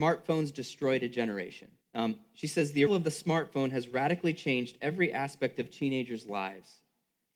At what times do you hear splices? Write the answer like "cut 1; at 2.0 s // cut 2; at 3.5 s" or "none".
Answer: cut 1; at 1.8 s // cut 2; at 2.9 s